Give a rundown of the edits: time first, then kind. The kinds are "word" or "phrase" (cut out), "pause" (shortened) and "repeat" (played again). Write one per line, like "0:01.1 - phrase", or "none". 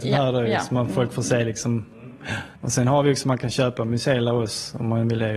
0:02.6 - pause

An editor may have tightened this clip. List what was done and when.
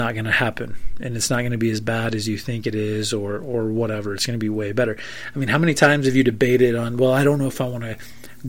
none

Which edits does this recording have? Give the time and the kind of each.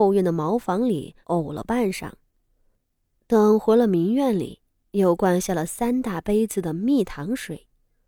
0:01.2 - pause

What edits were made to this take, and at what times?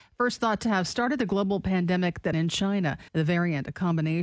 0:02.3 - word
0:03.1 - pause

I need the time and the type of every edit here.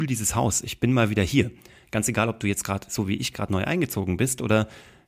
none

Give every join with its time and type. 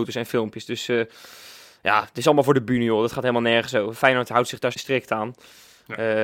0:04.7 - word

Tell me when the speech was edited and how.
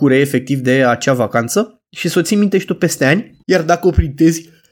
0:01.9 - pause
0:03.4 - pause

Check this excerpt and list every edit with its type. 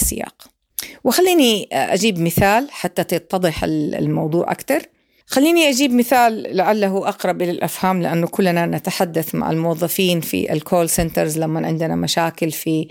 none

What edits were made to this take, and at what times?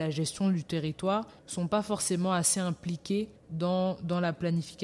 0:01.4 - pause
0:03.4 - pause

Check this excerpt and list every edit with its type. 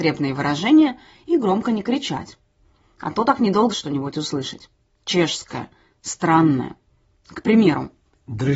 0:03.7 - phrase

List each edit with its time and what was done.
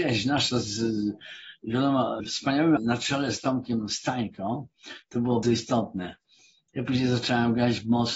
0:02.8 - word
0:05.4 - word

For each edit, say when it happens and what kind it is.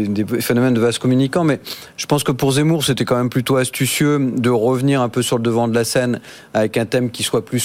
none

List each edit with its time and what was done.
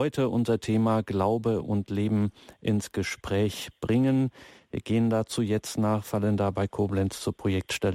none

